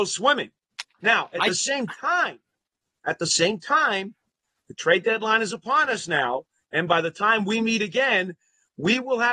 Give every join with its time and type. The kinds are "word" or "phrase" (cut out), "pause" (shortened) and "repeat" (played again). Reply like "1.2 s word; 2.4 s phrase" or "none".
3.0 s word